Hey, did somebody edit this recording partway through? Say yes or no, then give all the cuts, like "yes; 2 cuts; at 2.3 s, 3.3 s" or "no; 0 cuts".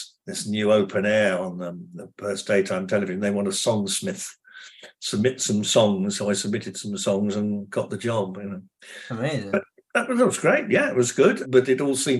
no; 0 cuts